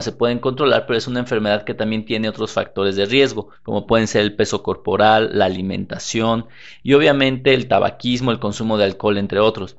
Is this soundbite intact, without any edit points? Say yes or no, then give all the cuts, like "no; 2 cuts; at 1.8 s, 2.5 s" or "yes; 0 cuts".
no; 1 cut; at 3.6 s